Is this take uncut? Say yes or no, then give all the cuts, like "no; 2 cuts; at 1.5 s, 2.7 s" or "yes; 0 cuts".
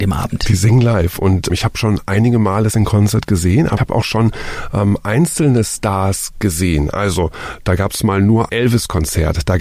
no; 4 cuts; at 1.5 s, 2.7 s, 3.8 s, 8.5 s